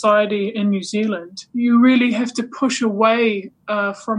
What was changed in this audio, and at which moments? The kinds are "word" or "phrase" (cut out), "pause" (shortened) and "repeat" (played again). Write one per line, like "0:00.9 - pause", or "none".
0:01.5 - pause